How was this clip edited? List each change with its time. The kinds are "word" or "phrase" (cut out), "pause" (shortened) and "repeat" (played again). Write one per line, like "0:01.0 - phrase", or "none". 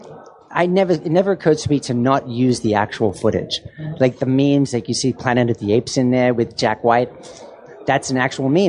none